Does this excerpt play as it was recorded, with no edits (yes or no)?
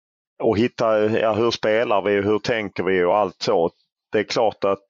yes